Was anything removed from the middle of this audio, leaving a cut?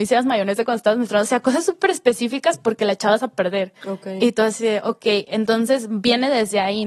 yes; 1 cut; at 3.8 s

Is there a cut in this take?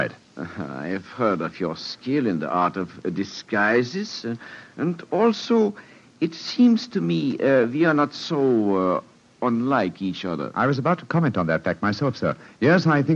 no; 0 cuts

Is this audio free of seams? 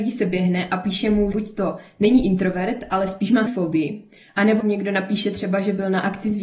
no; 3 cuts; at 1.3 s, 3.5 s, 4.6 s

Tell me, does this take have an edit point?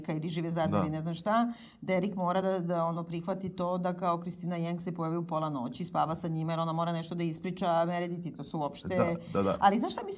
no; 0 cuts

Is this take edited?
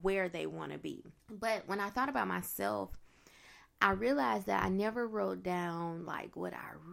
yes; 1 cut; at 1.2 s

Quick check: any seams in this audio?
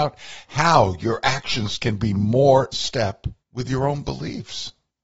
yes; 2 cuts; at 2.7 s, 3.4 s

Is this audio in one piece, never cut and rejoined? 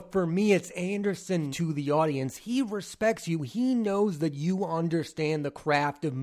no; 1 cut; at 1.5 s

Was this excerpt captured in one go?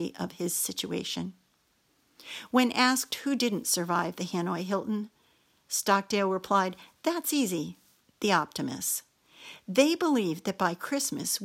yes; 0 cuts

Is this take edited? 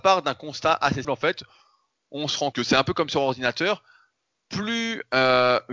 yes; 2 cuts; at 1.0 s, 2.5 s

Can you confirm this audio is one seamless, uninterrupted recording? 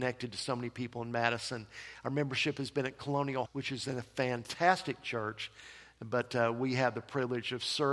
no; 1 cut; at 3.5 s

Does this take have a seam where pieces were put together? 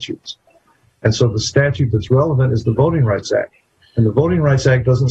no; 0 cuts

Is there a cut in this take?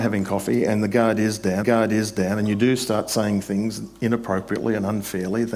yes; 1 cut; at 1.6 s

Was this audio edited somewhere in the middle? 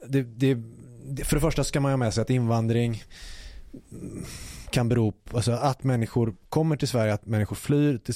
no; 0 cuts

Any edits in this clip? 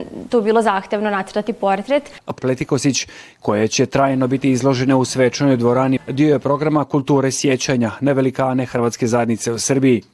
yes; 2 cuts; at 2.4 s, 6.0 s

